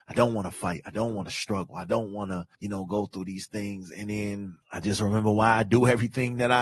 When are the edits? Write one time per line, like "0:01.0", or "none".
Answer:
0:02.5
0:04.6